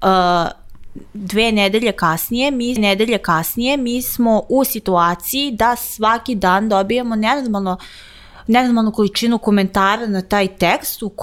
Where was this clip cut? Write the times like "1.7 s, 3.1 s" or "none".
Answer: 2.8 s